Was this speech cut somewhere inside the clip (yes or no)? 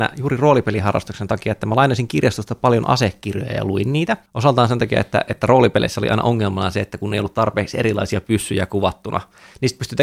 yes